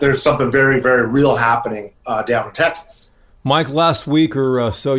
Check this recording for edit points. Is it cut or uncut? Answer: uncut